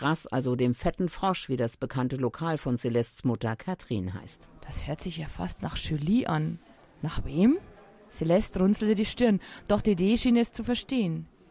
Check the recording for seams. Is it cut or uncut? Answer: uncut